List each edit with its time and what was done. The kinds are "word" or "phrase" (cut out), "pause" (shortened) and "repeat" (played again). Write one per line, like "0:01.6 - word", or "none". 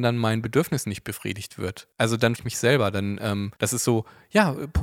0:01.9 - pause
0:02.4 - word
0:03.6 - pause